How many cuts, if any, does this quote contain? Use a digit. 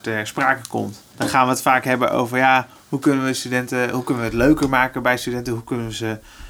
0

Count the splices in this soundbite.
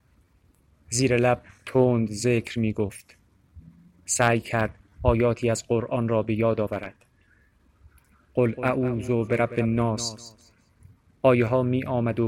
0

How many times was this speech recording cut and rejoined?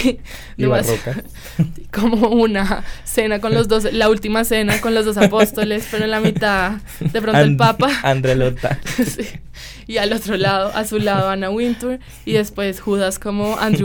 0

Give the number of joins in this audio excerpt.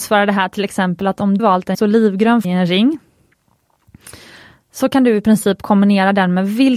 3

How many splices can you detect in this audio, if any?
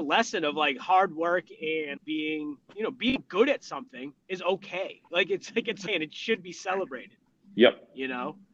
3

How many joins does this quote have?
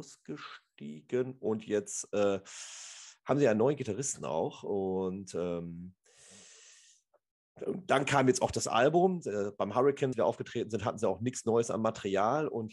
1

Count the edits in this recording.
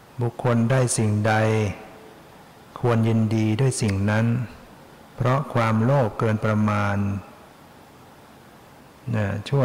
0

